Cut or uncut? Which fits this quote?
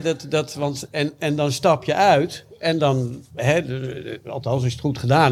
uncut